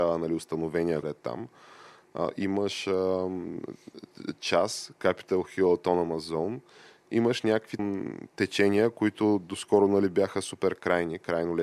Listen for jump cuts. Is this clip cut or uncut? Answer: cut